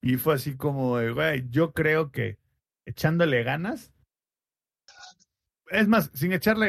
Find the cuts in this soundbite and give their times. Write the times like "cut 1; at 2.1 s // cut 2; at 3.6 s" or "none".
none

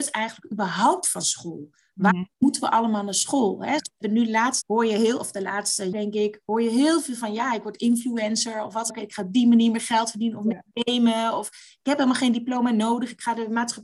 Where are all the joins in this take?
cut 1; at 4.6 s // cut 2; at 5.9 s // cut 3; at 8.9 s

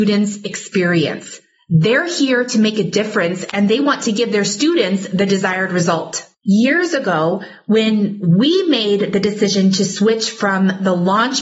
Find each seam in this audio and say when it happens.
none

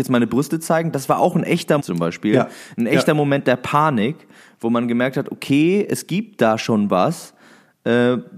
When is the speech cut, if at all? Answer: cut 1; at 1.8 s

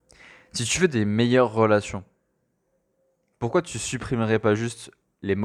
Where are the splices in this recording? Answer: none

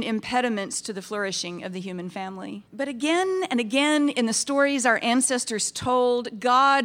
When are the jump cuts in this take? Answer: cut 1; at 2.7 s

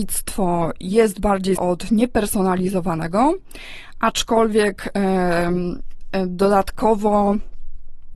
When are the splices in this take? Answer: cut 1; at 1.6 s

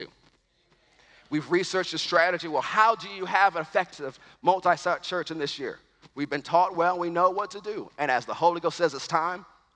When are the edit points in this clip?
none

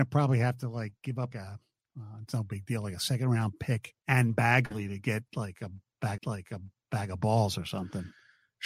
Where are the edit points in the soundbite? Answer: cut 1; at 1.3 s // cut 2; at 4.0 s // cut 3; at 6.2 s

